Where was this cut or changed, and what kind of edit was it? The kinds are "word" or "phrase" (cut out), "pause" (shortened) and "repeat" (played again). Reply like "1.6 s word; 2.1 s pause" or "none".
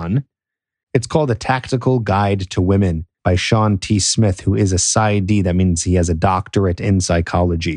3.1 s pause

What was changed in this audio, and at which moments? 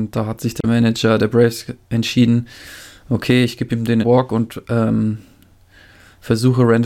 4.0 s word

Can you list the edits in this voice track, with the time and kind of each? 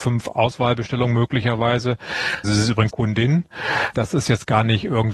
2.4 s word; 2.9 s word; 3.9 s word

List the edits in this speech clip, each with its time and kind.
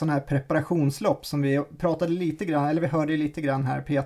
none

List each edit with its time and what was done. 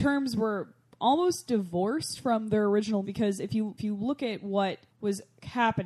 3.0 s word; 3.8 s word; 4.9 s pause

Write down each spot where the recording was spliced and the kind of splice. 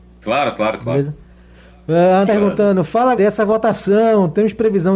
2.2 s word; 3.2 s word

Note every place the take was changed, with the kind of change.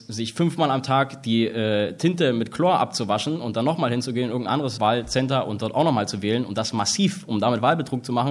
4.8 s word

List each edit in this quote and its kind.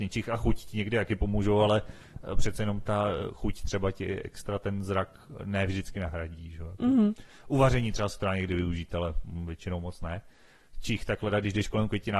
none

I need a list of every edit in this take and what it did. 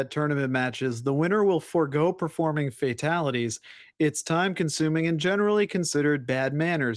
none

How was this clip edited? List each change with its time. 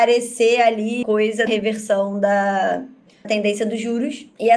1.0 s word; 1.5 s word; 3.2 s word

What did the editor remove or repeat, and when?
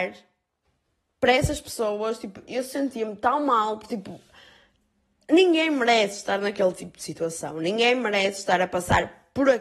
none

